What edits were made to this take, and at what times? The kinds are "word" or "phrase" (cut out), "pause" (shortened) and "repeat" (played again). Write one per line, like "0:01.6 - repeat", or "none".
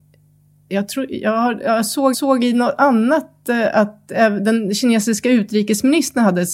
0:02.1 - repeat